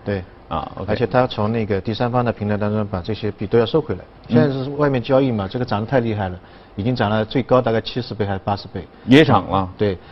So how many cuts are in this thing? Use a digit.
0